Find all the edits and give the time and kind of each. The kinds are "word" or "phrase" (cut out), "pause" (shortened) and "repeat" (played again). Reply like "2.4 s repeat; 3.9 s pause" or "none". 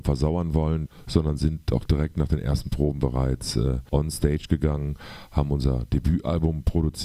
none